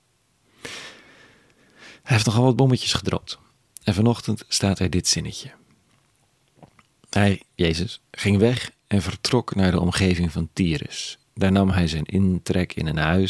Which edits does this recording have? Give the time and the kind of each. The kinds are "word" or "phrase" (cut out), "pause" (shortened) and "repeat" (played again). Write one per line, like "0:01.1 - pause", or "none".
none